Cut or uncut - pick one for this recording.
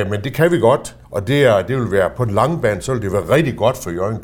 cut